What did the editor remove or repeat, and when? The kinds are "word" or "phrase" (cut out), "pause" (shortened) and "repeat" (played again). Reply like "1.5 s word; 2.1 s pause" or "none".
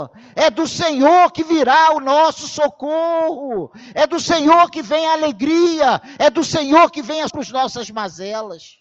7.3 s word